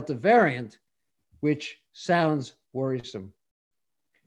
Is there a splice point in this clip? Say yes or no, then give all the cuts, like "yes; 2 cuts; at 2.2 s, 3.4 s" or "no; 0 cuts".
no; 0 cuts